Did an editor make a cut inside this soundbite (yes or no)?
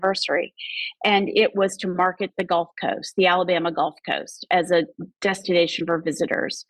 yes